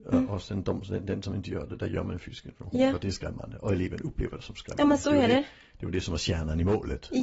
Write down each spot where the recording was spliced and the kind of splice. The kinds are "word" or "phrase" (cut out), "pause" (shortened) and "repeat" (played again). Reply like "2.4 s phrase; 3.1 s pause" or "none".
none